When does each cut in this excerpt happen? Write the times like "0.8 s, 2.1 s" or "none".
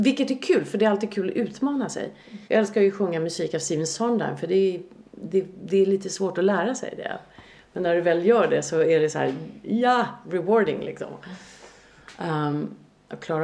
2.5 s